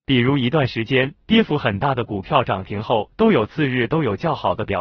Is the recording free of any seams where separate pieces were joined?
no; 2 cuts; at 1.2 s, 3.1 s

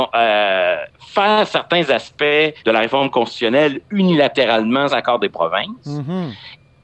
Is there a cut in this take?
yes; 3 cuts; at 0.9 s, 2.6 s, 4.9 s

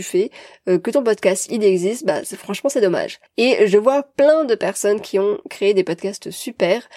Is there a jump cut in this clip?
no; 0 cuts

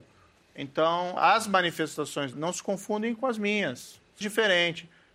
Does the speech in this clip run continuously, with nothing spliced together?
no; 3 cuts; at 1.2 s, 2.3 s, 4.2 s

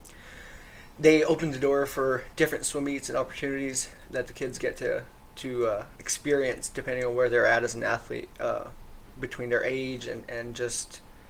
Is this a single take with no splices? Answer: yes; 0 cuts

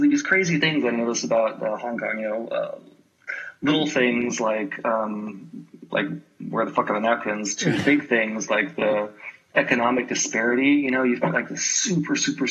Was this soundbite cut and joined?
no; 0 cuts

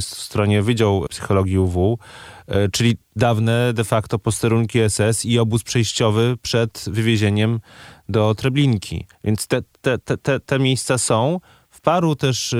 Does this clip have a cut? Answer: yes; 1 cut; at 9.1 s

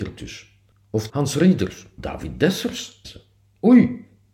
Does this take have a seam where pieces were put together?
yes; 3 cuts; at 1.1 s, 2.0 s, 3.0 s

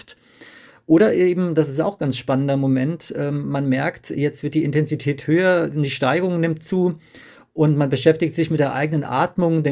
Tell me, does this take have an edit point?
no; 0 cuts

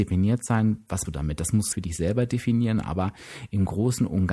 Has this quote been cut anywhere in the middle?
yes; 2 cuts; at 1.1 s, 1.7 s

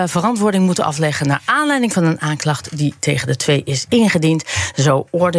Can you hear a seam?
no; 0 cuts

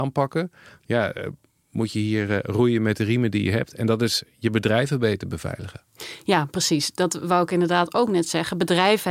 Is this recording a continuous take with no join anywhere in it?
yes; 0 cuts

